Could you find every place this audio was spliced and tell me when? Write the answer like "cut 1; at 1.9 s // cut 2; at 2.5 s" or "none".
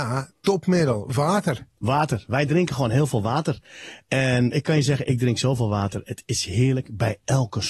cut 1; at 4.5 s